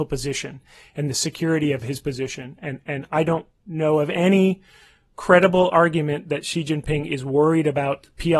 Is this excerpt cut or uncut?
uncut